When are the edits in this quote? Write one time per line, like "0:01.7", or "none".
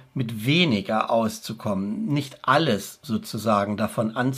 none